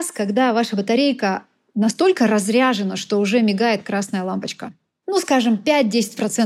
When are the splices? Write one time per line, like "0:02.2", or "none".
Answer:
none